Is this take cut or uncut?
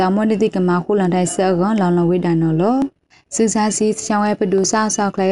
uncut